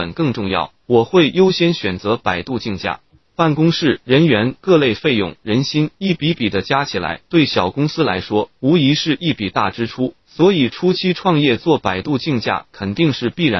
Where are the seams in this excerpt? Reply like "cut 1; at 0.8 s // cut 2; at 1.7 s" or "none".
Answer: none